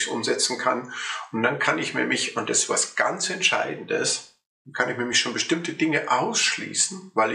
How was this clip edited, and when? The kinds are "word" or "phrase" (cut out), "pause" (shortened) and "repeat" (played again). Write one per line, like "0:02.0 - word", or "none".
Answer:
none